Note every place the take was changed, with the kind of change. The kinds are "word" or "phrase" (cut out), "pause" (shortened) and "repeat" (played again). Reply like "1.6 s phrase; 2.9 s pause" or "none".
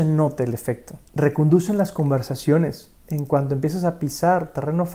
1.1 s pause; 3.0 s pause